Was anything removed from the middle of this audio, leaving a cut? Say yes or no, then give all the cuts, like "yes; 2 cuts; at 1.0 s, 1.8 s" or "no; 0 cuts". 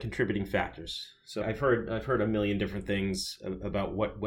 yes; 1 cut; at 1.4 s